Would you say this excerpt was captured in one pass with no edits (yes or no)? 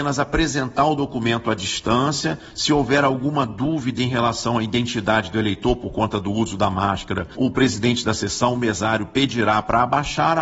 yes